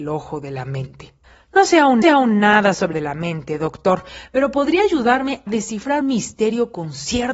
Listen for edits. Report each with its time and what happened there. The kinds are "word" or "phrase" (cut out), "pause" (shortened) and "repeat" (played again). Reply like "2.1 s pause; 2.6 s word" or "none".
1.2 s pause; 2.0 s repeat; 2.9 s phrase; 5.5 s word; 6.0 s word